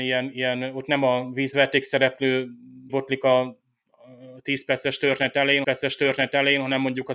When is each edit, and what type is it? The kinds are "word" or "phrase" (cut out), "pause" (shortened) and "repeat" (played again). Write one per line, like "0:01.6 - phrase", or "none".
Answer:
0:02.9 - word
0:05.6 - repeat